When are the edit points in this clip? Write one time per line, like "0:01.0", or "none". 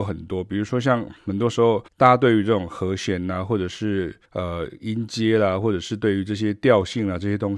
0:01.9
0:04.2